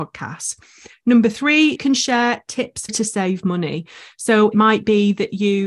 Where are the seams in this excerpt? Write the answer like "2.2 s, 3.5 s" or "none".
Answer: 1.8 s, 2.9 s, 4.5 s